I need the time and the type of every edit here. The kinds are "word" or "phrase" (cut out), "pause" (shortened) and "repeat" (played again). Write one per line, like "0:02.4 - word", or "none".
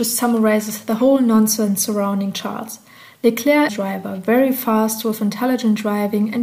0:03.7 - phrase